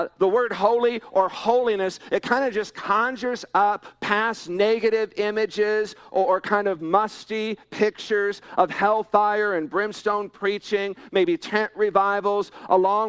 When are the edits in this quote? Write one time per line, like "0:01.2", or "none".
none

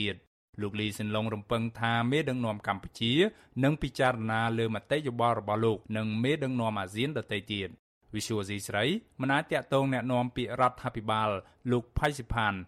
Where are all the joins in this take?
0:05.8

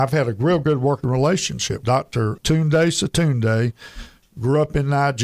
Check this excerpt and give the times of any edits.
0:01.8
0:02.4

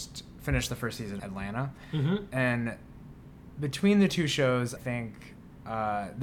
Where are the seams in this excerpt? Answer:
0:01.2
0:04.8

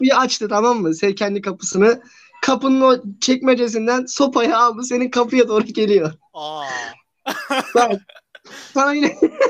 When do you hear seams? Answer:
none

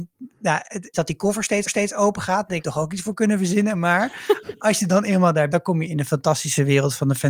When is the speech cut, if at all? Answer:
0:00.9
0:01.7
0:02.6
0:05.5

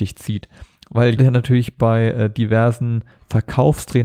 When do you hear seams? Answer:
0:01.2

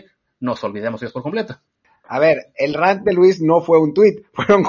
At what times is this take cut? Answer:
none

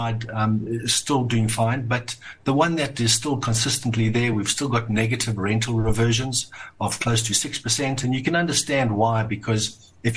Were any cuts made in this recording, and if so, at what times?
none

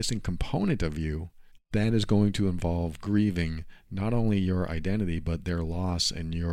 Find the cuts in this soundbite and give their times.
0:01.6

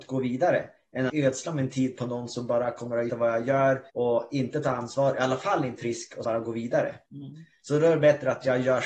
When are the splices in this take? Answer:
0:01.1
0:03.1
0:03.9
0:05.8
0:06.2
0:07.1

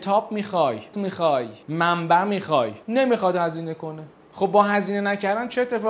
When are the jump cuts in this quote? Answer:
0:00.9
0:01.6
0:02.8
0:04.1

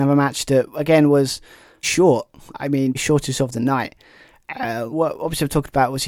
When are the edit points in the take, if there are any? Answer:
0:01.8
0:02.9
0:04.9

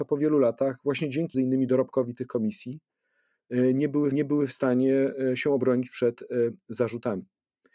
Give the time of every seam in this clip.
0:01.3
0:04.1

